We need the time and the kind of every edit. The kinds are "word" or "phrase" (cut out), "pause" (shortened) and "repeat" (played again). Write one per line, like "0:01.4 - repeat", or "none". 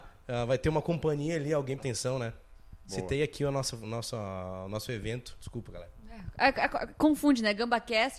0:01.8 - phrase